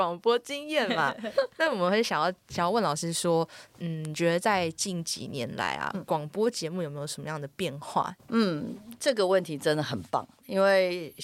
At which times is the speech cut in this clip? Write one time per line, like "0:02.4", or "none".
0:08.2